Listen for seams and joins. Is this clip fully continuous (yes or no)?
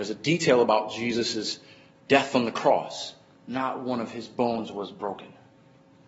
yes